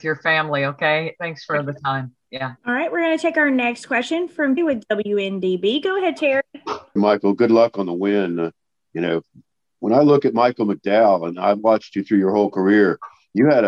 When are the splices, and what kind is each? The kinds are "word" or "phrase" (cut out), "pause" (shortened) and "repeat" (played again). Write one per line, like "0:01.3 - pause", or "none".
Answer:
0:02.6 - pause
0:04.6 - word
0:07.0 - word